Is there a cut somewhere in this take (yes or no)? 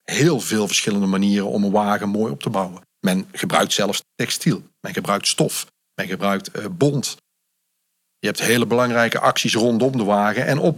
yes